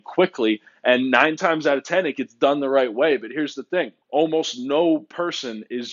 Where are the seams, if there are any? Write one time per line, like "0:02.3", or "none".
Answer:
0:04.0